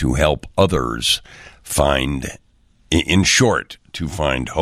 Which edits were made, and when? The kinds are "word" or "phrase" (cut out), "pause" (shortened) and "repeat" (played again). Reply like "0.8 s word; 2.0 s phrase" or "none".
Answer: none